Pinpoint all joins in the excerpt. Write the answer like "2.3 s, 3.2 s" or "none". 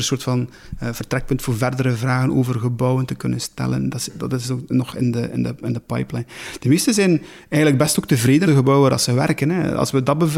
8.4 s